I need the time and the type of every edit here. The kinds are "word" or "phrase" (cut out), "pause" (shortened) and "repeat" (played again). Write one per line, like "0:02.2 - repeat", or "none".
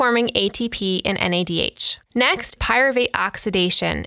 0:02.6 - word

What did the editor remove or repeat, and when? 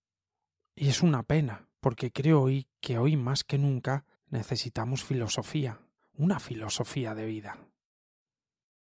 0:01.7 - pause
0:02.7 - pause
0:04.1 - pause
0:06.0 - pause

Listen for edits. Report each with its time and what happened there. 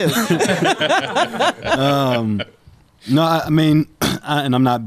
none

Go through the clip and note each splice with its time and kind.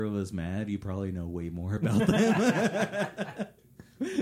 none

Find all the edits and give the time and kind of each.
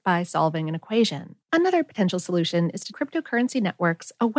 0:01.4 - pause
0:02.9 - word

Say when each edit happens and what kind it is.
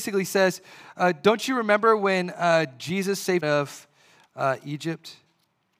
0:03.4 - phrase

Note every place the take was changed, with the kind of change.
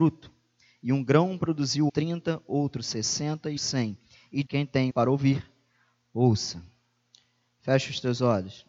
0:01.9 - word
0:03.6 - word
0:04.4 - word
0:04.9 - word

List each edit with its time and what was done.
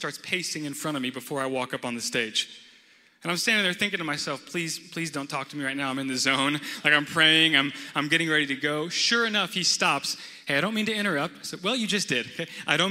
none

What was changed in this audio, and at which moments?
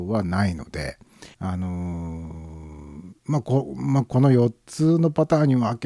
0:01.3 - pause
0:03.2 - pause

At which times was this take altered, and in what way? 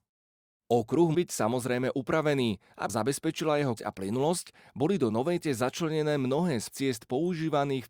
0:01.1 - word
0:02.9 - word
0:03.8 - word
0:05.4 - word
0:06.7 - word

